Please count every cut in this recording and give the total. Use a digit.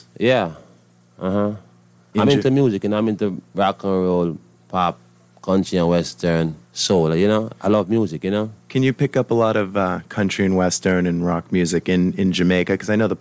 1